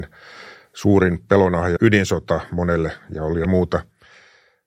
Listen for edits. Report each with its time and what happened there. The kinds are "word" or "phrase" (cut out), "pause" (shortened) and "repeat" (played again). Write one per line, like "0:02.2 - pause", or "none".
0:01.8 - word
0:03.4 - word